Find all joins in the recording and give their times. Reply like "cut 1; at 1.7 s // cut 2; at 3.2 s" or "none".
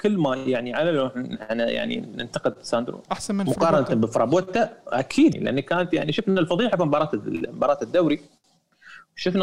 cut 1; at 3.0 s // cut 2; at 5.3 s